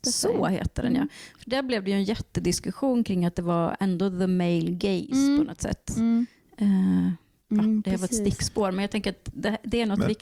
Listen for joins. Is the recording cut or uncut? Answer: uncut